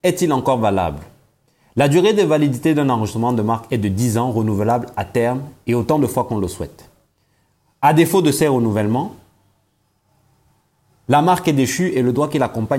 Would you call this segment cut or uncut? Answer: uncut